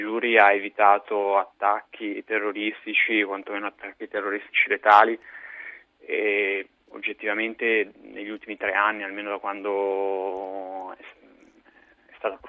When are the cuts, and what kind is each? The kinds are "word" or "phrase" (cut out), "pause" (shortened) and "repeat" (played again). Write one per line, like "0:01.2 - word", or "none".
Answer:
0:08.0 - pause